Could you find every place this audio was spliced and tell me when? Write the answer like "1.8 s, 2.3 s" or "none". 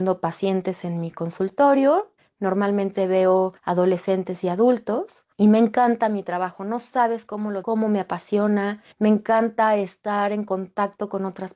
2.2 s, 3.6 s, 5.3 s, 7.6 s, 8.9 s